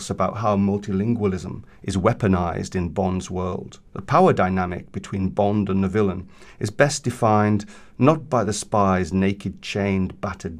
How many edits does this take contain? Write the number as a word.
one